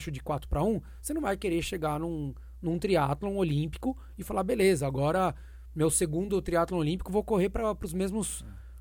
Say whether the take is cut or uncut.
uncut